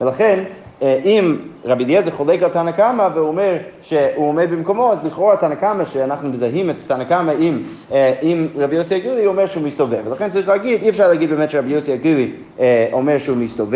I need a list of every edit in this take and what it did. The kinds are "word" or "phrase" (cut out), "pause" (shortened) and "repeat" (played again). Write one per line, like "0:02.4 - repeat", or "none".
none

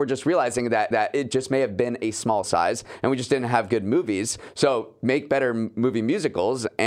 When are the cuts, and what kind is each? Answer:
0:00.9 - repeat
0:02.4 - word

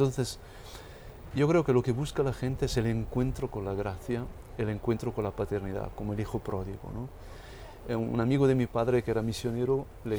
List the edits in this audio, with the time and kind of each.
none

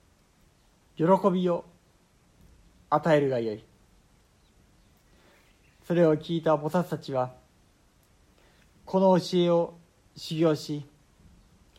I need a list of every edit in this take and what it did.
none

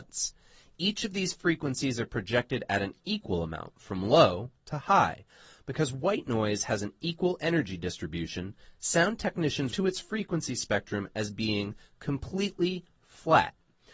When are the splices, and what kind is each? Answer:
0:09.7 - word

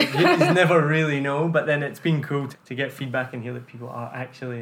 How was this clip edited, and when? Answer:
0:02.5 - word

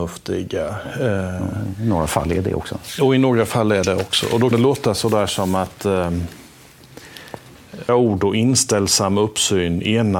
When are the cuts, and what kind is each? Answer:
0:04.5 - word
0:07.9 - word

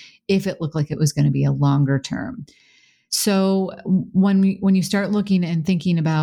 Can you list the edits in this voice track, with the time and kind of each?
none

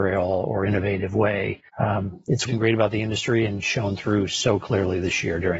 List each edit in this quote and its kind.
0:01.7 - pause
0:02.4 - phrase

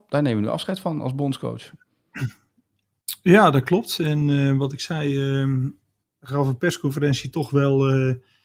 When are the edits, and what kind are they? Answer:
none

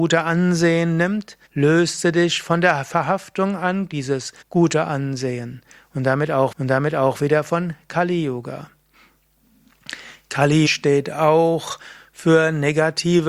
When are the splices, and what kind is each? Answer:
0:01.5 - pause
0:04.4 - pause
0:06.5 - repeat
0:10.7 - word

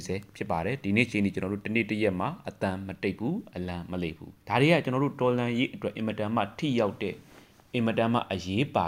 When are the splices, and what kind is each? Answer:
0:04.4 - pause

